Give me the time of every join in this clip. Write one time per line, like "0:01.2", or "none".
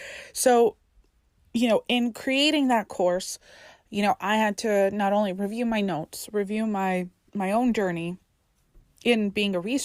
0:07.3